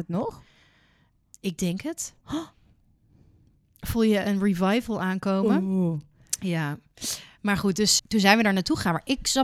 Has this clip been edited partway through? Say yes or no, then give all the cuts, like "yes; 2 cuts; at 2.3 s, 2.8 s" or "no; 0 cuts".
yes; 2 cuts; at 2.2 s, 8.0 s